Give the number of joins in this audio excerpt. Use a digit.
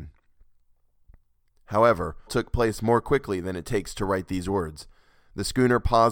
1